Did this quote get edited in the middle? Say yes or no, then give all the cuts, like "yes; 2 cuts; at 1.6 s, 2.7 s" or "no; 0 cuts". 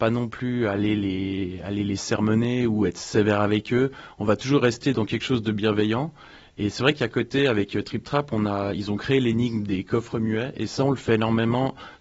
no; 0 cuts